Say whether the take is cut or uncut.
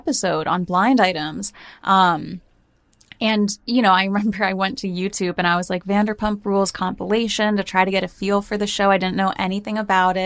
uncut